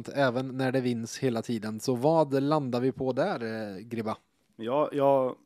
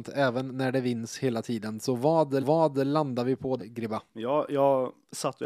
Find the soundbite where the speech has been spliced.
second; 3 cuts; at 2.4 s, 3.6 s, 4.1 s

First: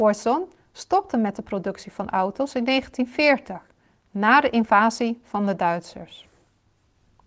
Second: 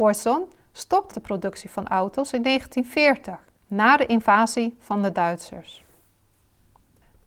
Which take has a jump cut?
second; 2 cuts; at 1.1 s, 3.6 s

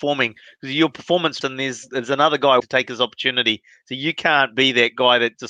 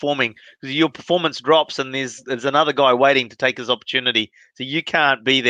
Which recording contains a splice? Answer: first; 2 cuts; at 1.4 s, 2.6 s

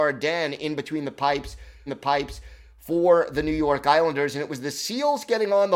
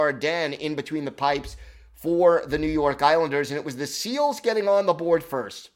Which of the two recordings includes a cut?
first; 1 cut; at 1.9 s

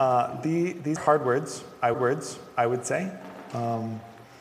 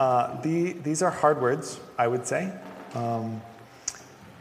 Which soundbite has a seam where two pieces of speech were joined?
first; 2 cuts; at 1.0 s, 1.9 s

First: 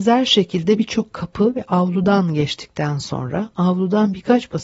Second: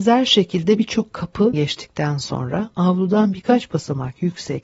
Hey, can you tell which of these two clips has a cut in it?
second; 1 cut; at 1.5 s

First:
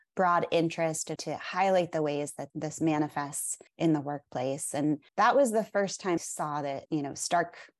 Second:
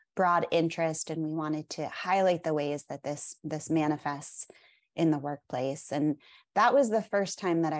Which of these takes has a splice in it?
first; 6 cuts; at 1.2 s, 2.5 s, 3.7 s, 5.1 s, 6.2 s, 6.9 s

